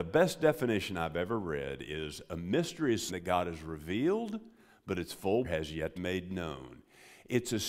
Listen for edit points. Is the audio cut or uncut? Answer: cut